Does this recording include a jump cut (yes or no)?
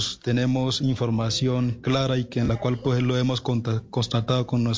no